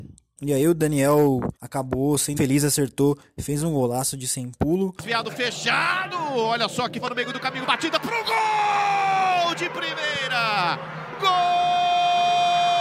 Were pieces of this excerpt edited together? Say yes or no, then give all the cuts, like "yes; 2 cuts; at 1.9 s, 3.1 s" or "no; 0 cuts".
yes; 4 cuts; at 1.6 s, 2.4 s, 7.0 s, 7.7 s